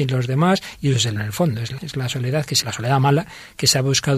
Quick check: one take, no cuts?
no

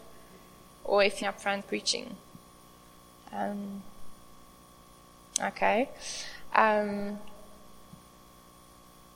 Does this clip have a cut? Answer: yes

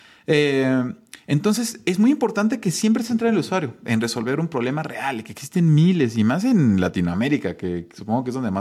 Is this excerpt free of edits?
yes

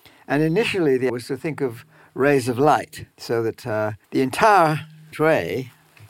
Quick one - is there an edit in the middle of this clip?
yes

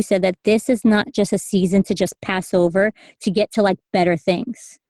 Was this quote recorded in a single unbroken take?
yes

